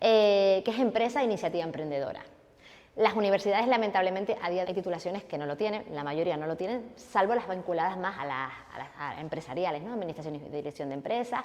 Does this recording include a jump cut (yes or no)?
yes